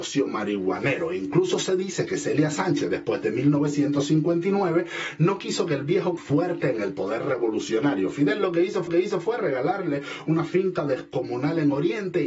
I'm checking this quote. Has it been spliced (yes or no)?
yes